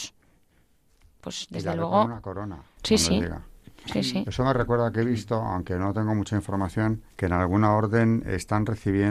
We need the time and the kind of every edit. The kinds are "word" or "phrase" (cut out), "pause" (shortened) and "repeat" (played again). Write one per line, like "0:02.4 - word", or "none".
0:07.1 - pause